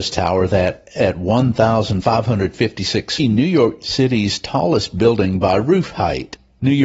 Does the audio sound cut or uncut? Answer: cut